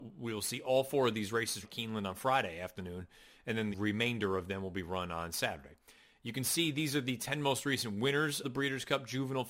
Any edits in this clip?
yes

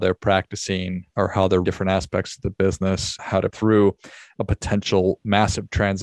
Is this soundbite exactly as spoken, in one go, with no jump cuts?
no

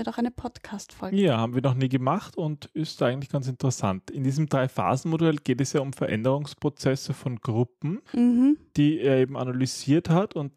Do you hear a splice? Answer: yes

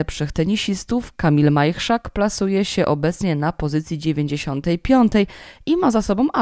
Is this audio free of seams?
yes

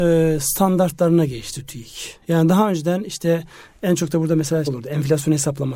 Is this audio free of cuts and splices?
no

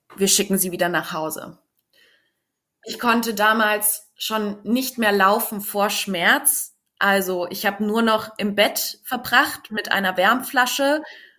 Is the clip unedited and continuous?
yes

